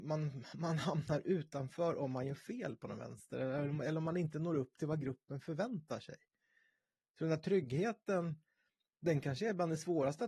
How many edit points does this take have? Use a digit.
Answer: 0